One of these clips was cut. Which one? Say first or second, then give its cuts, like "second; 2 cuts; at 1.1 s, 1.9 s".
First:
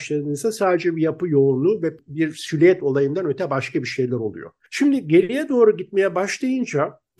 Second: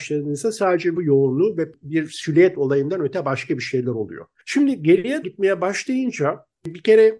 second; 2 cuts; at 1.0 s, 5.2 s